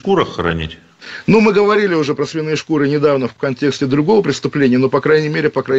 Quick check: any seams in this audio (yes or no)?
no